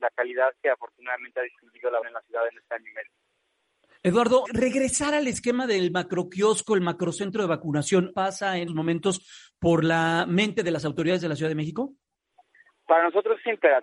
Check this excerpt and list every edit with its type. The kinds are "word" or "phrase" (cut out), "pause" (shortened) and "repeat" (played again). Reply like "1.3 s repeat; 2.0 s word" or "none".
2.0 s word; 4.4 s word; 8.1 s word; 8.7 s word